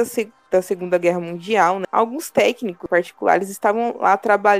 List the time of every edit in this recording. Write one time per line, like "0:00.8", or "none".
none